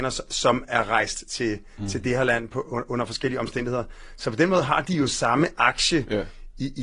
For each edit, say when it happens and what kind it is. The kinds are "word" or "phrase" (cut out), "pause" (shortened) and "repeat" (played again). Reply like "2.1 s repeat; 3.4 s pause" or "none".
none